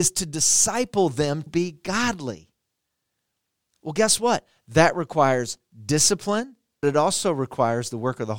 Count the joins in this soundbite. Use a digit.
2